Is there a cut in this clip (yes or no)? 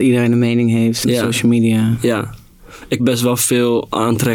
yes